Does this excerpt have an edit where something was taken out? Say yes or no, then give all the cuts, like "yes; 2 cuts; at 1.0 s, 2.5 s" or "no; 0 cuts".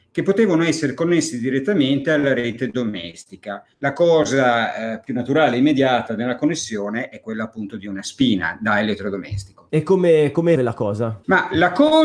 yes; 2 cuts; at 3.7 s, 10.6 s